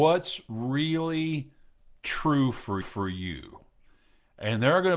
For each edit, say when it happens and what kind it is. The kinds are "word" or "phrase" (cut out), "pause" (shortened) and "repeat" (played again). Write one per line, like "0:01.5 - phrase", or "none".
0:02.8 - repeat

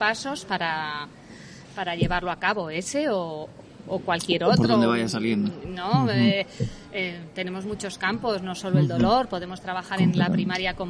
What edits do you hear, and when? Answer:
none

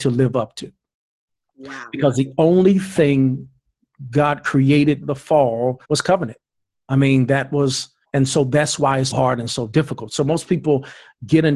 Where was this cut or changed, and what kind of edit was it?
0:05.0 - word
0:05.8 - pause
0:08.0 - pause
0:09.1 - word

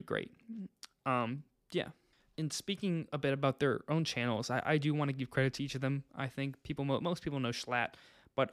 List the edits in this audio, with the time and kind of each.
0:02.1 - pause

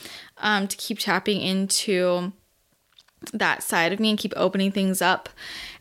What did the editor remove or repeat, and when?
none

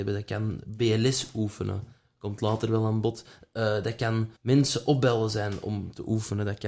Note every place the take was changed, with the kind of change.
0:04.4 - pause

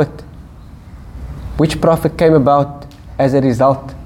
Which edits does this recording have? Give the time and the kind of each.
none

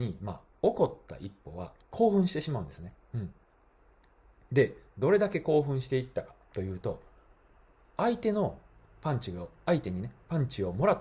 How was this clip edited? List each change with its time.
0:01.8 - pause
0:03.0 - pause
0:06.4 - pause

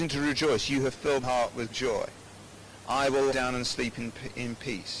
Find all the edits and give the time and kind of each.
0:01.2 - word
0:01.7 - word
0:03.3 - word

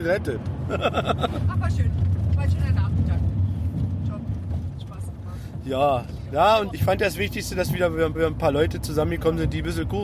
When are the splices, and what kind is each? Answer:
0:06.7 - word
0:08.1 - repeat

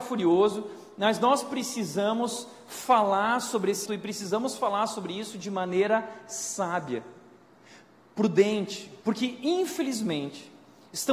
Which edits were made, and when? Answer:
0:03.9 - word
0:09.0 - pause

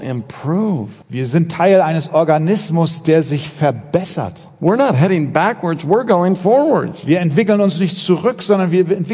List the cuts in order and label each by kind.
0:01.0 - pause

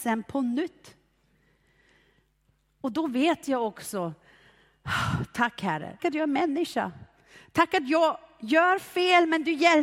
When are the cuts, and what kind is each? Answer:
0:06.0 - word

